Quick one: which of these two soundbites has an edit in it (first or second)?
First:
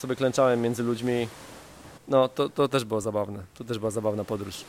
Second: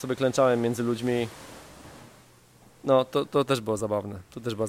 first